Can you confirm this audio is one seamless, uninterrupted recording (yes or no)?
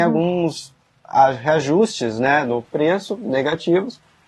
yes